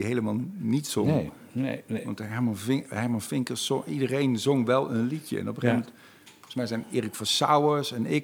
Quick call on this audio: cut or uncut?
uncut